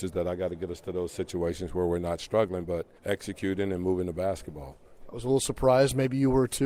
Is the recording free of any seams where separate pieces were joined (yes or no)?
no